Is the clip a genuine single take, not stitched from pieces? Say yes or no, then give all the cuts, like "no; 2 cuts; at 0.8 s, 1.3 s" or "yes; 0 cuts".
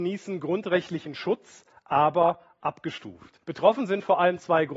no; 1 cut; at 3.4 s